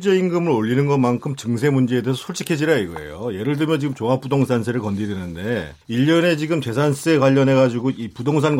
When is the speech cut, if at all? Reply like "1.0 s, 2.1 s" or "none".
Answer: 5.8 s